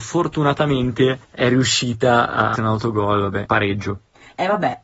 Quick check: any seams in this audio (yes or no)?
yes